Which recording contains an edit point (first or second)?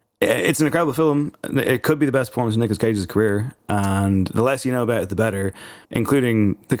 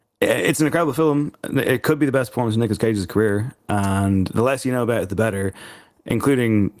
first